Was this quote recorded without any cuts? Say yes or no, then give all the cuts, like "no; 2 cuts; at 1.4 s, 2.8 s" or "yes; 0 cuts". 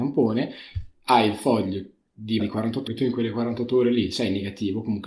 no; 2 cuts; at 2.4 s, 2.9 s